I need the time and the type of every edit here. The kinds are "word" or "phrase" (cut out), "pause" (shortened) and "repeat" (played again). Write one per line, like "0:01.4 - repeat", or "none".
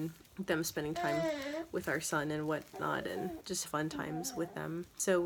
0:03.6 - phrase